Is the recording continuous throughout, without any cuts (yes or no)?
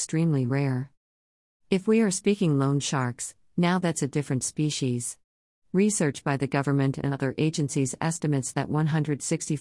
yes